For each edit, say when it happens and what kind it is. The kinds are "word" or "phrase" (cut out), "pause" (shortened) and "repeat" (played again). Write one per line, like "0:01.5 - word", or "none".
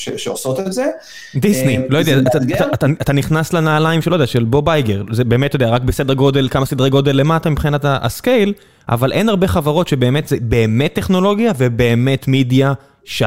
none